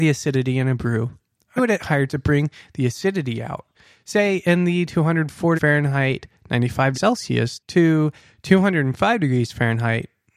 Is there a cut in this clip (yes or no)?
yes